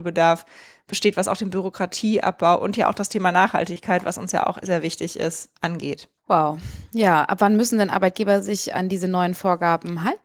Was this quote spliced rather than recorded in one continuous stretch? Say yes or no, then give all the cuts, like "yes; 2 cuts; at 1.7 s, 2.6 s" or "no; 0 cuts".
yes; 1 cut; at 6.2 s